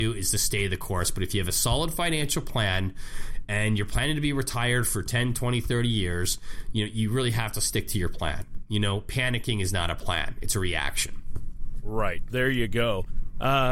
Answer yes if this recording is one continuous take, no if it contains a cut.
yes